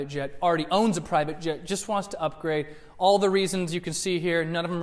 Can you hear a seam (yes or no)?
no